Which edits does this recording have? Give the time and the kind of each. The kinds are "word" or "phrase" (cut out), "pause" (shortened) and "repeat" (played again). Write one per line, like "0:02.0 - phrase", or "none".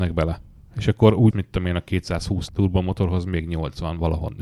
0:01.3 - word
0:02.5 - word